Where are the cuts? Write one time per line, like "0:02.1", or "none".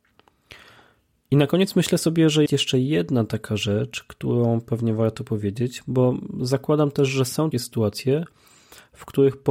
0:02.5
0:07.5